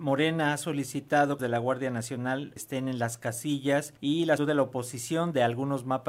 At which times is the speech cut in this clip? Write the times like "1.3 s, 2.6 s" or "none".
1.4 s, 2.6 s, 4.0 s, 4.4 s